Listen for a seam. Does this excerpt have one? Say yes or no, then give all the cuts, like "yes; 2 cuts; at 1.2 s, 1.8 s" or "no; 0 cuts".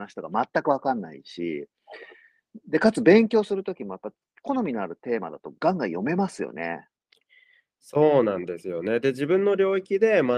no; 0 cuts